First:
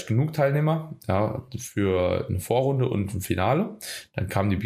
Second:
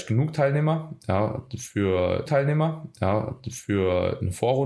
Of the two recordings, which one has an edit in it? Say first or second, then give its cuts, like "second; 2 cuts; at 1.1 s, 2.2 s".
second; 1 cut; at 2.3 s